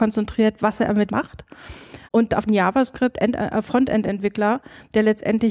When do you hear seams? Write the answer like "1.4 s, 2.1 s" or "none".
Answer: 1.1 s, 2.0 s, 2.5 s